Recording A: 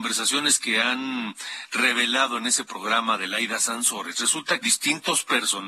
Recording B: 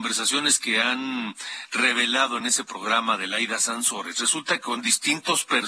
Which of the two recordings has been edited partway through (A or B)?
A